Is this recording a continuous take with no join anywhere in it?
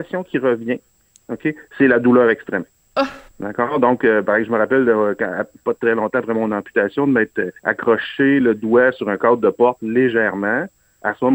no; 2 cuts; at 3.3 s, 7.6 s

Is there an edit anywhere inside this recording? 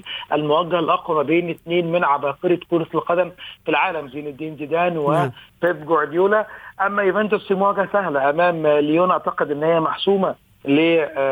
no; 0 cuts

